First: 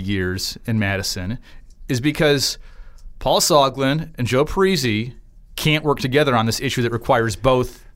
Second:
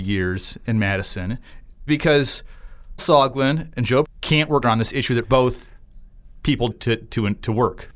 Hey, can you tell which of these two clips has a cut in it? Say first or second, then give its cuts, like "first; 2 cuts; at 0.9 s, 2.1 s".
second; 6 cuts; at 1.9 s, 3.0 s, 4.0 s, 4.6 s, 5.2 s, 6.7 s